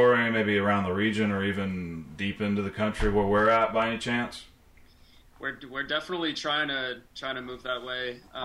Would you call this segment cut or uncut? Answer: uncut